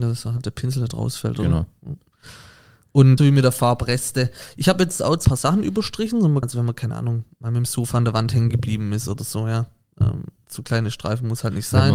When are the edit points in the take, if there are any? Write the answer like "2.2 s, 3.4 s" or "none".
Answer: 3.2 s, 5.2 s, 6.4 s